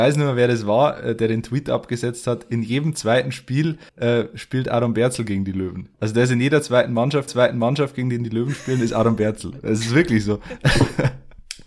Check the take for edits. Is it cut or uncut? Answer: cut